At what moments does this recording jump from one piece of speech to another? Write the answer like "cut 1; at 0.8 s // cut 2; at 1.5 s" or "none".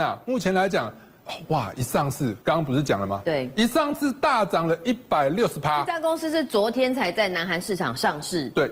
cut 1; at 2.4 s